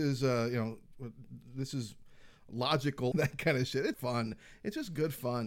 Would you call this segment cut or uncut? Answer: cut